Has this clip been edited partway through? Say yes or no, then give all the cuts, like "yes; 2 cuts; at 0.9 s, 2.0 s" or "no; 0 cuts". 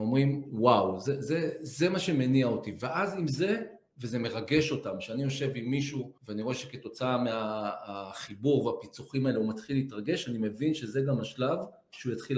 yes; 1 cut; at 6.2 s